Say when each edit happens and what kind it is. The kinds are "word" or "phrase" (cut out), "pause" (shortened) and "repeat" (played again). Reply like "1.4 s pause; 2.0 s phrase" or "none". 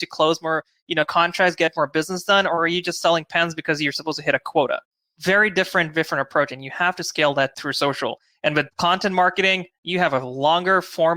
none